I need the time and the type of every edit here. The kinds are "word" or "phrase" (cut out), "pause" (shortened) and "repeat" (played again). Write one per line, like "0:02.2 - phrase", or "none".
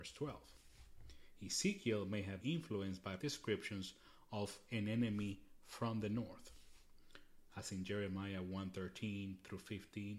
0:02.4 - word
0:03.2 - word